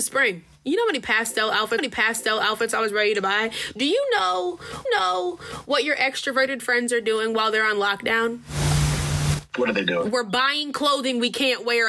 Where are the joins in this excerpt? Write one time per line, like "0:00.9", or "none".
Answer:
0:01.8
0:04.9

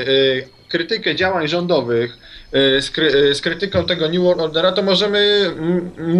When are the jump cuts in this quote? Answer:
none

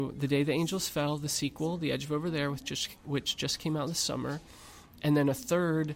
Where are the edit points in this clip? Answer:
none

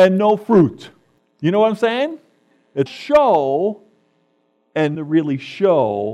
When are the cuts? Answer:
0:01.2
0:02.9
0:04.9

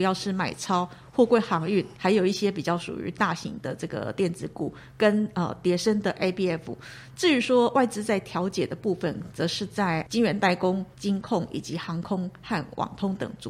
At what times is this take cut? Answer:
0:01.9
0:10.9

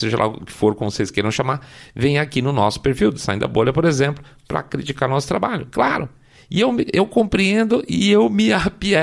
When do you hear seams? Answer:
none

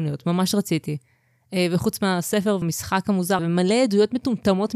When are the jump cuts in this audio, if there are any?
0:02.6
0:03.4

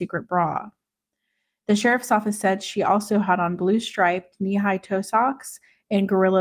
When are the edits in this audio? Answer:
none

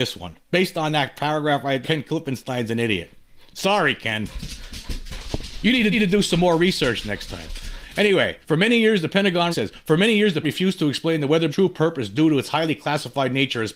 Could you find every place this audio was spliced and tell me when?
0:01.8
0:05.9
0:08.4
0:09.5
0:10.4
0:11.5

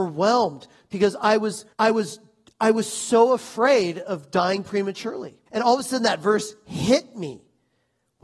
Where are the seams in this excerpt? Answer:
0:01.7
0:05.5

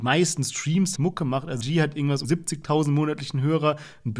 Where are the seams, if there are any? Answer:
0:01.0
0:01.6
0:02.2

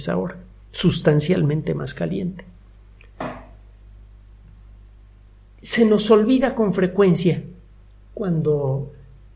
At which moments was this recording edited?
none

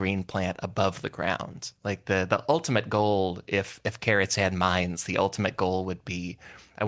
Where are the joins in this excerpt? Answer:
0:01.8

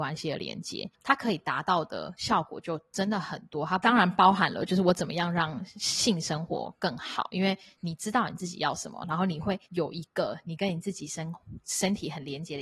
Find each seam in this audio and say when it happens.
0:09.6

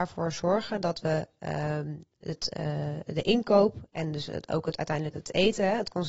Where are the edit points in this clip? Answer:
0:05.1

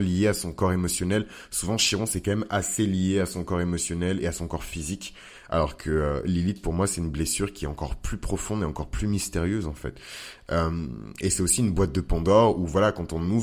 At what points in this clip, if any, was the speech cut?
none

